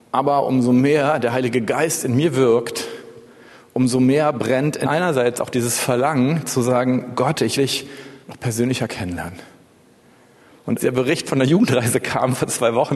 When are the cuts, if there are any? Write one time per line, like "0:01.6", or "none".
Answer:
0:04.8
0:07.6
0:08.2
0:10.8